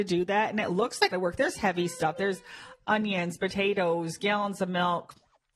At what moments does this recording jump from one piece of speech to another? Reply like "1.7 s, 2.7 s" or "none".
1.1 s